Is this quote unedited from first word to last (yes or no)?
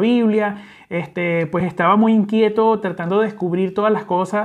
yes